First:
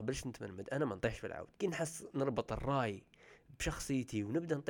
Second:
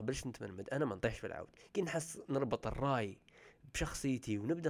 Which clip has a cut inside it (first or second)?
first